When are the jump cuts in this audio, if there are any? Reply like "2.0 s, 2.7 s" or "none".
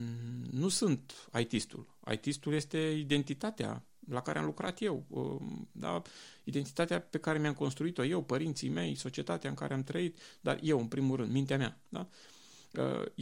none